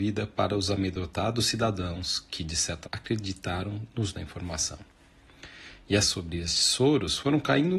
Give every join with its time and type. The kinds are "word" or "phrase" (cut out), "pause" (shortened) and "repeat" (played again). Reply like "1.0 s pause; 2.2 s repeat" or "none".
2.8 s word; 4.1 s word; 6.0 s word